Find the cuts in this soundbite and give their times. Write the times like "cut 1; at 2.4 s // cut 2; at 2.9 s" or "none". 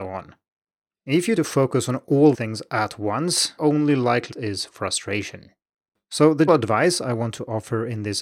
cut 1; at 1.4 s // cut 2; at 2.3 s // cut 3; at 3.6 s // cut 4; at 4.3 s // cut 5; at 6.5 s